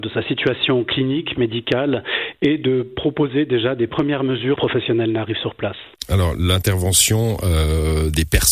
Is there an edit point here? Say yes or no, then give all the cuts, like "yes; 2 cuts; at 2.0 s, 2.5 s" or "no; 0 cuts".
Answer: yes; 1 cut; at 4.6 s